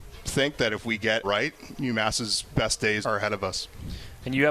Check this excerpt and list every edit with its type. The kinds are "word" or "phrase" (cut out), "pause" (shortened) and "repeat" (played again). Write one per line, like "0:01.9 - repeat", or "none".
0:01.2 - word
0:03.0 - word